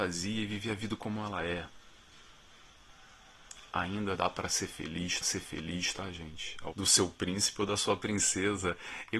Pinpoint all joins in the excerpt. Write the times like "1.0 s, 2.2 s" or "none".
4.1 s, 5.2 s, 6.7 s